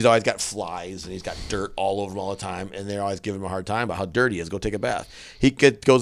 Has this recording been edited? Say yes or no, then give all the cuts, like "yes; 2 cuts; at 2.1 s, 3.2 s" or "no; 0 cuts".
no; 0 cuts